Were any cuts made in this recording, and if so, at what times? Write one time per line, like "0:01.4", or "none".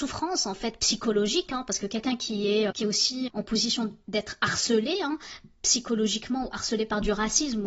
0:02.7
0:03.3